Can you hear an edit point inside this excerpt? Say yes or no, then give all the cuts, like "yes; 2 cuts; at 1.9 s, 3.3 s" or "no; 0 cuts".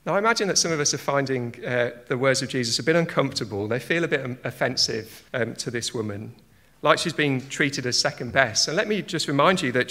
yes; 1 cut; at 5.3 s